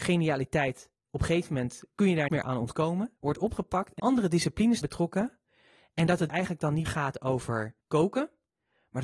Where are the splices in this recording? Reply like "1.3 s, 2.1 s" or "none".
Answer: 1.0 s, 1.9 s, 2.3 s, 3.2 s, 4.0 s, 4.8 s, 6.3 s, 6.9 s, 7.8 s